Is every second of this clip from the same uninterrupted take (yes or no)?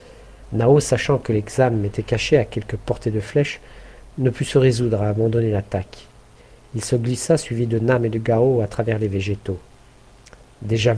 yes